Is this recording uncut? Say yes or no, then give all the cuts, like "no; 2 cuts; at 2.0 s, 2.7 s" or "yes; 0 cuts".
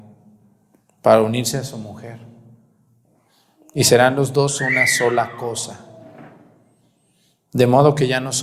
yes; 0 cuts